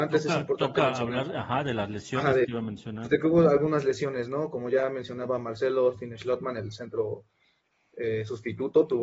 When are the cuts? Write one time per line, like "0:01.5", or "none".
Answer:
0:02.4